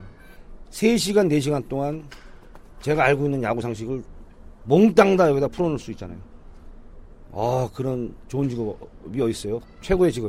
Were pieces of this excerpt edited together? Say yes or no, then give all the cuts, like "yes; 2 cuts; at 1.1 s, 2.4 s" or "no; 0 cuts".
no; 0 cuts